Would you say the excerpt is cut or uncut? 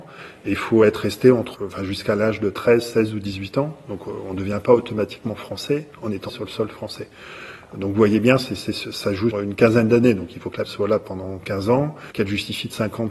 cut